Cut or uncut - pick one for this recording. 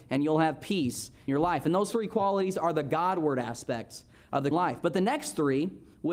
cut